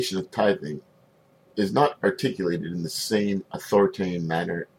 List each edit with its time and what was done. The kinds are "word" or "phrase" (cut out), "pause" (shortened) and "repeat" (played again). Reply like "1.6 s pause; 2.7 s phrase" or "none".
none